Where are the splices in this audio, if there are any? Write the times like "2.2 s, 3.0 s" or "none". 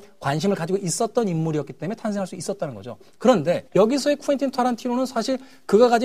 3.7 s